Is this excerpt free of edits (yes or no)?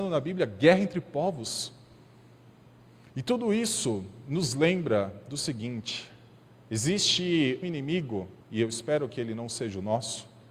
no